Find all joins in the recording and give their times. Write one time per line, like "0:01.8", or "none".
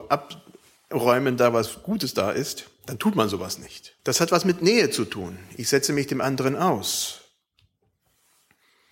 0:04.0

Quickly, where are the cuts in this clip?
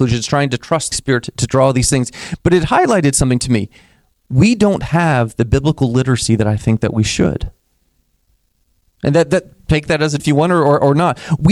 0:00.9
0:10.2

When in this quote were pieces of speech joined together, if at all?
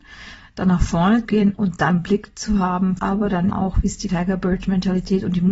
0:01.2
0:01.9
0:03.0
0:03.5
0:04.1

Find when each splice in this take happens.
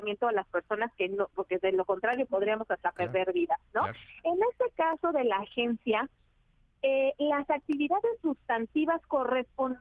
0:01.3

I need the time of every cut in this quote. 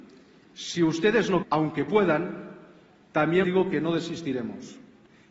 0:01.4
0:03.4

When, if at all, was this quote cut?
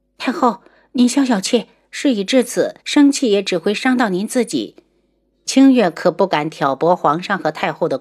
0:02.8

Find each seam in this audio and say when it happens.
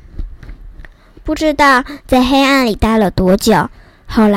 none

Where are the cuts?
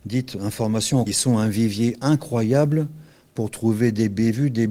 0:01.1

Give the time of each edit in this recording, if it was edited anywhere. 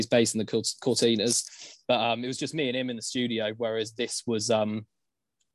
none

